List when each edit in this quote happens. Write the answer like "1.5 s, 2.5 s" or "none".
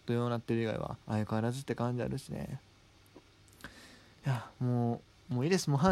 1.0 s